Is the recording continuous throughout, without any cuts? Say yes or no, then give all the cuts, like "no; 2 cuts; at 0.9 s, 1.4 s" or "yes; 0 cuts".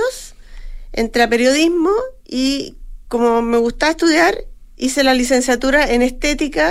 yes; 0 cuts